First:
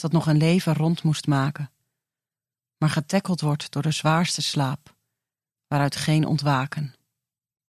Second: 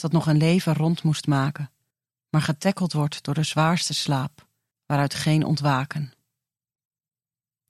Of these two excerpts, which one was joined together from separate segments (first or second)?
second